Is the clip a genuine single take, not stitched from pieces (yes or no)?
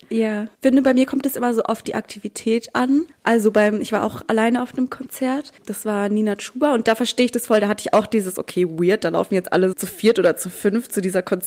no